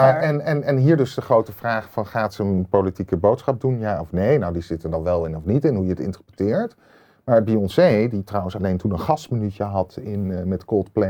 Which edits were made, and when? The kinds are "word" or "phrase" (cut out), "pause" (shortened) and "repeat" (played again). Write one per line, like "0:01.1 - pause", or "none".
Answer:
none